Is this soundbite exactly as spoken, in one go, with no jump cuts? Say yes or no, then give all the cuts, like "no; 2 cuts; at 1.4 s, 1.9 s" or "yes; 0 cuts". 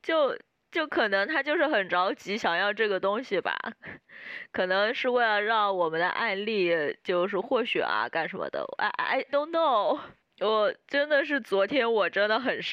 no; 1 cut; at 9.3 s